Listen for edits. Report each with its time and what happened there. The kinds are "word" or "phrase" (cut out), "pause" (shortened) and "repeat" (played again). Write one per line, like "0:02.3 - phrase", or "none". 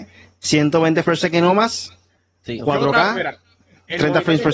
0:01.0 - word
0:02.6 - word